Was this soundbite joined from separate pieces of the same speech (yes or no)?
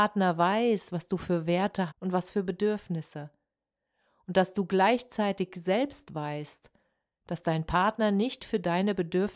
yes